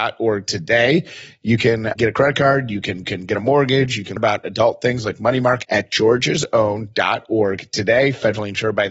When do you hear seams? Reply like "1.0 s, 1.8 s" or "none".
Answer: 2.0 s, 3.0 s, 4.2 s, 5.6 s